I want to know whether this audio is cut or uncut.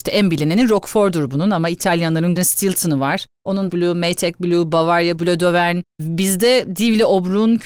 cut